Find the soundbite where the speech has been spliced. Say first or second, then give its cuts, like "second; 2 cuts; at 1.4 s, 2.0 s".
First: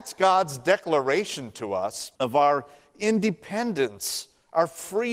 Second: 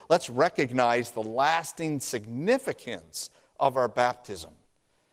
first; 1 cut; at 2.2 s